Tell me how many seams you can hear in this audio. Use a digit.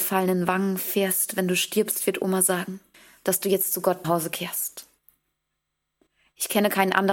2